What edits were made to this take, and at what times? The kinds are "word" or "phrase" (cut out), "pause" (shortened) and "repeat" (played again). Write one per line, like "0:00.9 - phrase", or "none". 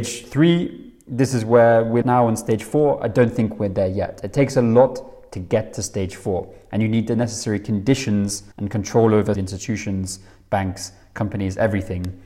0:02.0 - phrase
0:08.5 - pause
0:09.3 - word